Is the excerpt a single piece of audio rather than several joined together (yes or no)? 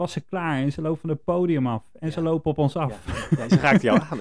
yes